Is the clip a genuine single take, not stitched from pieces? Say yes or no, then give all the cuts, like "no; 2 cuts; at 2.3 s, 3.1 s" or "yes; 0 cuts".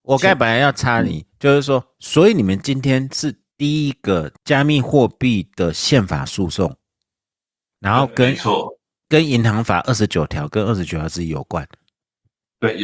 no; 1 cut; at 4.4 s